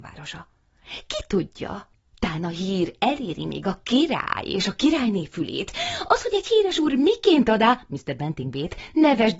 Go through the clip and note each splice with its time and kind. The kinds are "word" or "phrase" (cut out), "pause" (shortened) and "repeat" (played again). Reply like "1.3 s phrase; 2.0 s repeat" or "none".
1.9 s pause